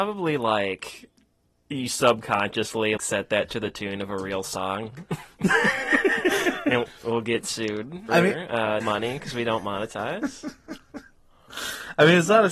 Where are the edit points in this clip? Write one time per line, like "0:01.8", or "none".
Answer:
0:03.0
0:06.9
0:08.1
0:08.8